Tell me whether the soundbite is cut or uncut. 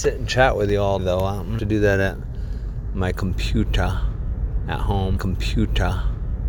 cut